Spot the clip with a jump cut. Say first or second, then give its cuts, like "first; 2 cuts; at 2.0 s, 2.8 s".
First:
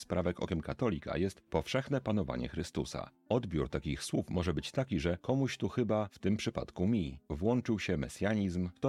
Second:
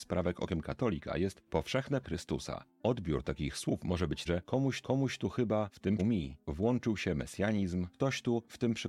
second; 4 cuts; at 2.0 s, 4.3 s, 4.8 s, 6.0 s